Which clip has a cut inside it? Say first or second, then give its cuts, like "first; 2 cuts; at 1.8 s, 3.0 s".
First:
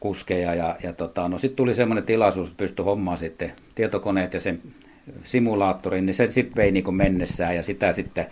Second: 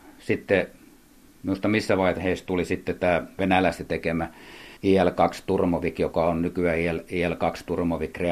second; 1 cut; at 4.8 s